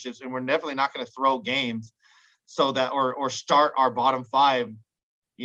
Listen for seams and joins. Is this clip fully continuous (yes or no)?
yes